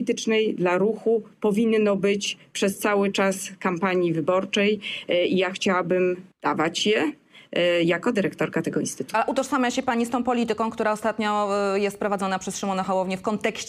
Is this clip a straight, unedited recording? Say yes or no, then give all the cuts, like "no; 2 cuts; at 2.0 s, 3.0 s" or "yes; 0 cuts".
no; 1 cut; at 6.3 s